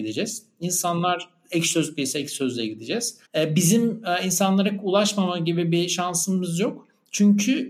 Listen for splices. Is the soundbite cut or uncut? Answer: cut